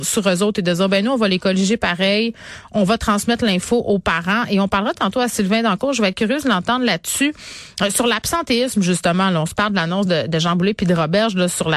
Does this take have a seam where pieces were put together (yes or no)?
no